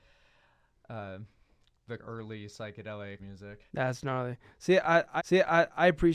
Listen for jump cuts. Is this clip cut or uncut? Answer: cut